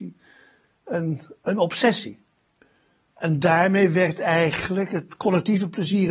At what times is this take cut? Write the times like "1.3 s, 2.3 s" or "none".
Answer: none